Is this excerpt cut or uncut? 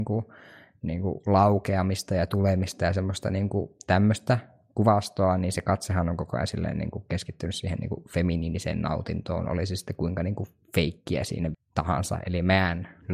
cut